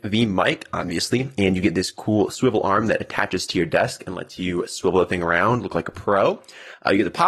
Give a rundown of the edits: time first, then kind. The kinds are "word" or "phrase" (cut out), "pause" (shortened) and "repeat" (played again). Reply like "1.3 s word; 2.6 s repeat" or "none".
none